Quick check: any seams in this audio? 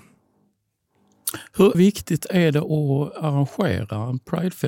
yes; 1 cut; at 1.7 s

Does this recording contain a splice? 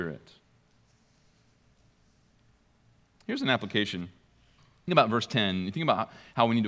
yes; 1 cut; at 4.9 s

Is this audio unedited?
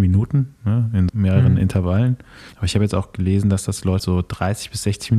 no; 3 cuts; at 1.1 s, 2.5 s, 4.0 s

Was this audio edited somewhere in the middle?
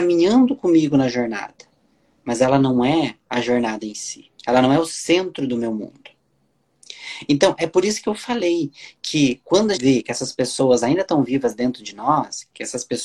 yes; 2 cuts; at 4.4 s, 9.8 s

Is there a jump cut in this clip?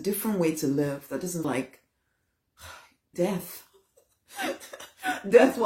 yes; 2 cuts; at 1.4 s, 3.1 s

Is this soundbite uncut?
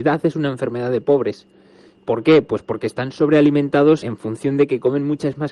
no; 1 cut; at 4.0 s

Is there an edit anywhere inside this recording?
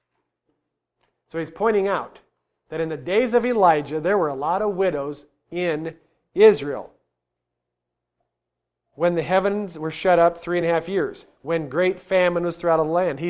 no; 0 cuts

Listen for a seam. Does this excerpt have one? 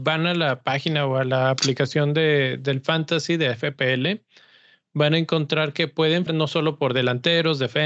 yes; 1 cut; at 6.3 s

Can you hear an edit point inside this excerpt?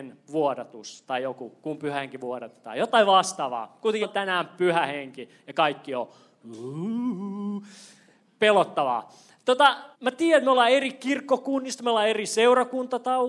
yes; 2 cuts; at 4.0 s, 9.9 s

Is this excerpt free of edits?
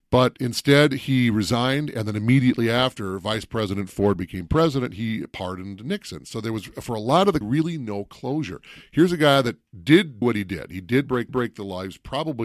no; 3 cuts; at 7.4 s, 10.2 s, 11.3 s

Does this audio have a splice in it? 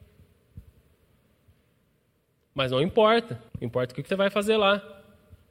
yes; 2 cuts; at 3.5 s, 4.1 s

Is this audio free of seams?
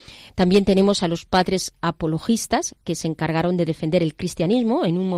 yes; 0 cuts

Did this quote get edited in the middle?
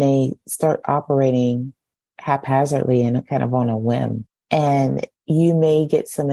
no; 0 cuts

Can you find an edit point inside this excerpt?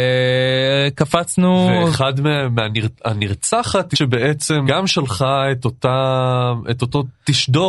yes; 2 cuts; at 3.9 s, 4.7 s

